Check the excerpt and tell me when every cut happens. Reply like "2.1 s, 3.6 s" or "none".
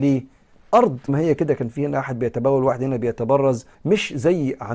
1.1 s, 3.7 s